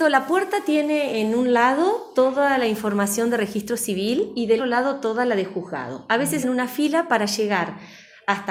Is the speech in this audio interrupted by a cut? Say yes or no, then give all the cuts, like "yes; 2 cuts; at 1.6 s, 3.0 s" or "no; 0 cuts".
yes; 2 cuts; at 4.6 s, 6.4 s